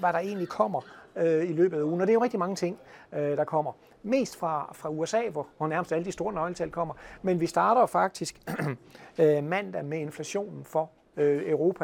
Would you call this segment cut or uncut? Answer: uncut